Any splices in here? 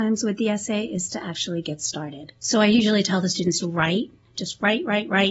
yes; 2 cuts; at 2.4 s, 3.6 s

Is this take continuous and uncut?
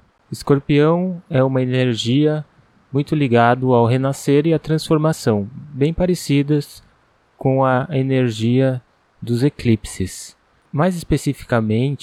yes; 0 cuts

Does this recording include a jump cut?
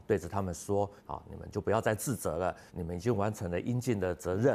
yes; 2 cuts; at 1.0 s, 2.7 s

